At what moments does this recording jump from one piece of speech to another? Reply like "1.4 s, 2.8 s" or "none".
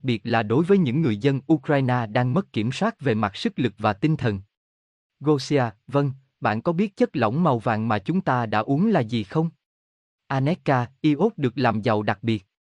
none